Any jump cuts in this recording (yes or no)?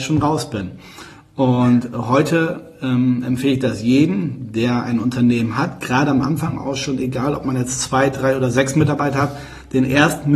no